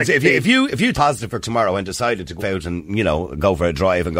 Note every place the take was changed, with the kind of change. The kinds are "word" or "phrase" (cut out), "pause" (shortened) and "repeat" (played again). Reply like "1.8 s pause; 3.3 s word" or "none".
0.9 s word; 1.4 s word; 2.4 s word